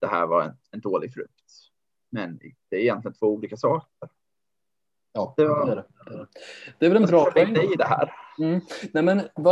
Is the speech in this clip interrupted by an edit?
no; 0 cuts

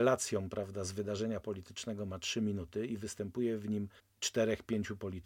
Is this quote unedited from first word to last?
no; 1 cut; at 4.0 s

